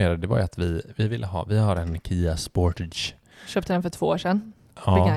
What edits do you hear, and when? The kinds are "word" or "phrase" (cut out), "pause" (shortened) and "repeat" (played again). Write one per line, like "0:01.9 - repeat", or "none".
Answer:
none